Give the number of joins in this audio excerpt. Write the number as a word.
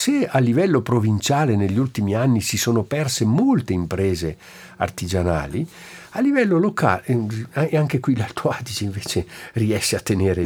zero